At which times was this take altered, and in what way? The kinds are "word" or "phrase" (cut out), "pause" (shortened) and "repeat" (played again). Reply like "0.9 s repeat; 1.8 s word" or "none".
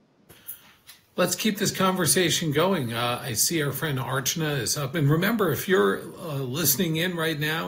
4.9 s phrase

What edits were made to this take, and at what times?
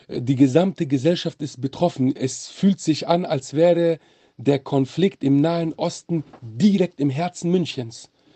none

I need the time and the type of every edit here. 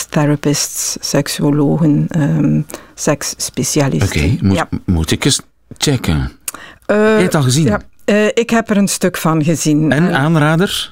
none

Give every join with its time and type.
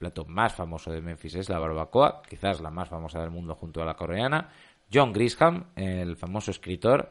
none

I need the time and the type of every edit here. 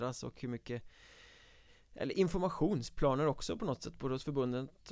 none

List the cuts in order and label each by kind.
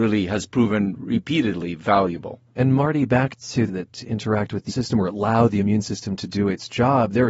3.7 s phrase; 4.7 s word

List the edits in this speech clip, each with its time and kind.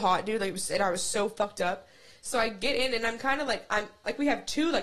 none

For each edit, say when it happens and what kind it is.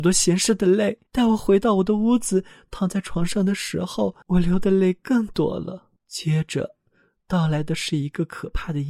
1.1 s pause; 4.2 s pause; 6.0 s pause

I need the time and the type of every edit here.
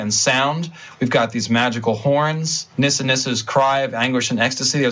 2.7 s pause

